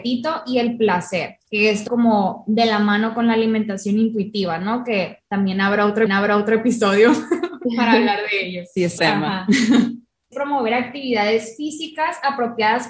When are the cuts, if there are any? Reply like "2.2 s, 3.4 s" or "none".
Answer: 1.4 s, 1.9 s, 6.1 s, 9.0 s, 10.3 s